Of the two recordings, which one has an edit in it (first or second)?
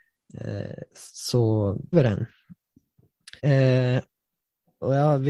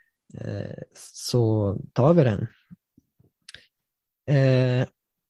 first